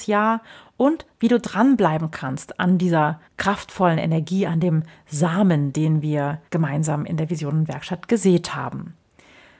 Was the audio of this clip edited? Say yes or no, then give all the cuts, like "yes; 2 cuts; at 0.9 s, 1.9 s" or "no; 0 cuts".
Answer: yes; 2 cuts; at 3.3 s, 6.5 s